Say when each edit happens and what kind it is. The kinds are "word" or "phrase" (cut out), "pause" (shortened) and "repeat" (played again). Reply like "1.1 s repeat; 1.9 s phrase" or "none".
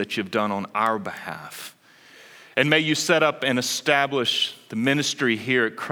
none